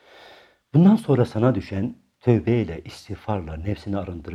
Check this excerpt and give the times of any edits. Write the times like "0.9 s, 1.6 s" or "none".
none